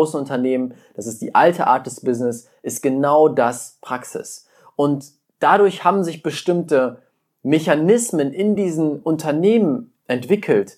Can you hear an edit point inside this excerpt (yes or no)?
no